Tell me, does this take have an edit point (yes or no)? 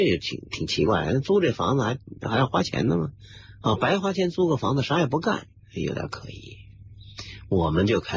yes